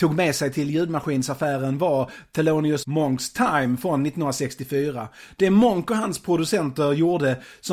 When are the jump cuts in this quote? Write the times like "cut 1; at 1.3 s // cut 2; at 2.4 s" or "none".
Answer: cut 1; at 2.8 s